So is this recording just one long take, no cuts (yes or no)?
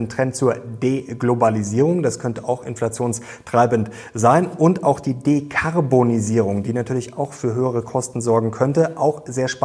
yes